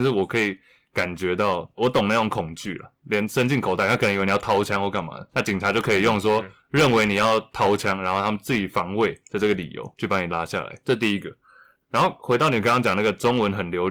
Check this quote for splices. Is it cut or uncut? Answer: uncut